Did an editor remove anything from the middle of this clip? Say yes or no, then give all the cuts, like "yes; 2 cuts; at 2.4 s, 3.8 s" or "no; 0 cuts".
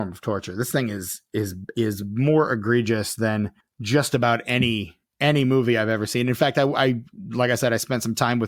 yes; 1 cut; at 3.6 s